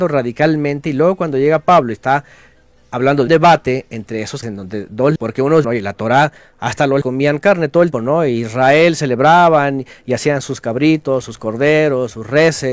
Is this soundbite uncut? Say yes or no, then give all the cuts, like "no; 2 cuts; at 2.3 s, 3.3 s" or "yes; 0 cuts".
no; 6 cuts; at 3.3 s, 4.4 s, 5.2 s, 5.6 s, 7.0 s, 7.9 s